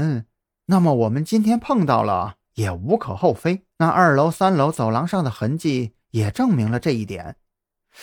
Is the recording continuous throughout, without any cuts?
no; 1 cut; at 3.7 s

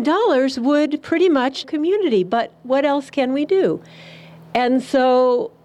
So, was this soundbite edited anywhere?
yes; 1 cut; at 1.6 s

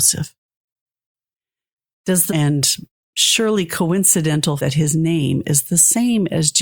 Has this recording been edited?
yes; 2 cuts; at 2.3 s, 4.6 s

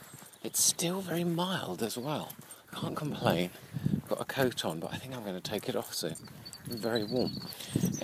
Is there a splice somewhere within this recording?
yes; 1 cut; at 2.6 s

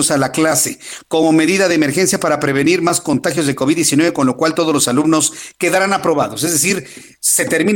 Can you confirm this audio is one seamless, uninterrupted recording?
yes; 0 cuts

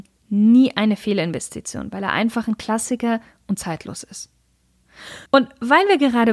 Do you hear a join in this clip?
yes; 1 cut; at 5.3 s

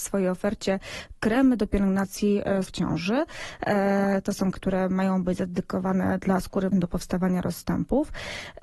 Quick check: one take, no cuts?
no; 3 cuts; at 2.6 s, 4.5 s, 6.7 s

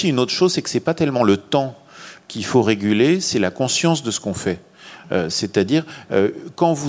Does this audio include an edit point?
no; 0 cuts

